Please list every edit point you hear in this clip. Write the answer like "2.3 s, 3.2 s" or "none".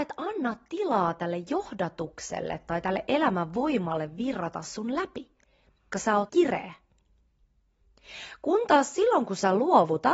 5.9 s, 6.3 s

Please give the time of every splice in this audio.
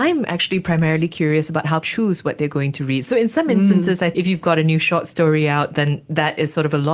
1.8 s, 4.1 s

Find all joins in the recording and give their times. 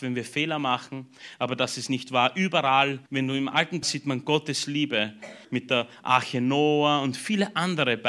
3.1 s, 3.8 s, 5.4 s

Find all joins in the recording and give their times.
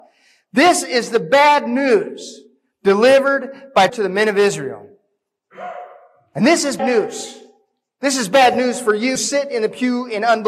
3.9 s, 6.8 s, 9.2 s

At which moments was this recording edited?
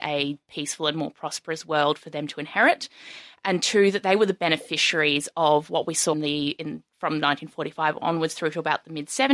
6.1 s

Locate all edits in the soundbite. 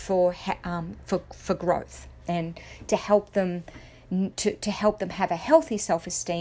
none

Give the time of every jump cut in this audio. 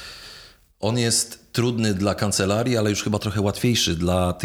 none

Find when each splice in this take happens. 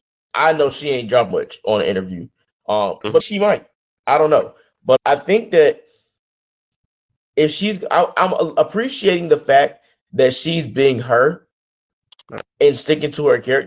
1.3 s, 3.2 s, 5.0 s

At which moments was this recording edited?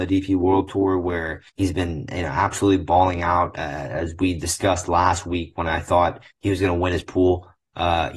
1.5 s, 6.3 s

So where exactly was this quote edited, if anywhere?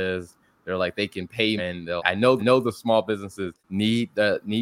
1.6 s, 2.0 s, 2.4 s, 3.6 s

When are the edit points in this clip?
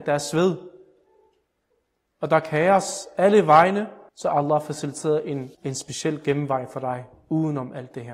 4.1 s, 5.5 s, 7.1 s

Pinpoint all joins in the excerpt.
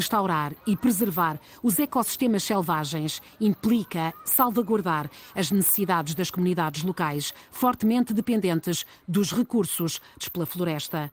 10.2 s

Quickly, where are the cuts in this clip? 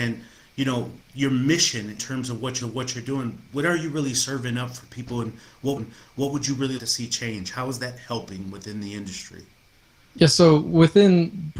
1.0 s, 2.0 s, 2.6 s, 5.8 s, 6.8 s

